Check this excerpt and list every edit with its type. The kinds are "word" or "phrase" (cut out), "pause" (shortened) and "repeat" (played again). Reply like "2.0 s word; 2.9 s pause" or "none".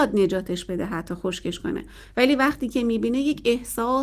none